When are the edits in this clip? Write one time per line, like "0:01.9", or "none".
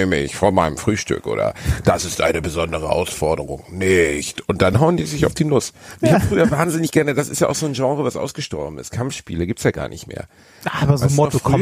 none